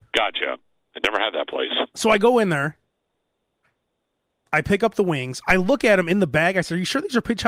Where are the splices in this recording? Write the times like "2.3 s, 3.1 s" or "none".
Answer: none